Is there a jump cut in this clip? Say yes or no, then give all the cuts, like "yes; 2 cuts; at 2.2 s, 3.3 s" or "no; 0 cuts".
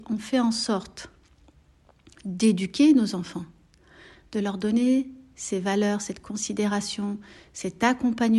no; 0 cuts